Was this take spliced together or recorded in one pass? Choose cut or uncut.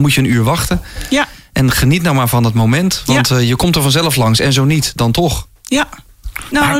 uncut